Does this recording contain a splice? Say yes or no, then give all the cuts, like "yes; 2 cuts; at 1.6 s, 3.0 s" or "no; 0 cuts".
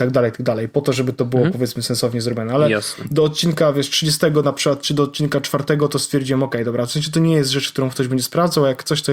no; 0 cuts